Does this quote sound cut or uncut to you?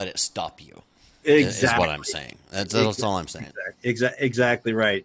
cut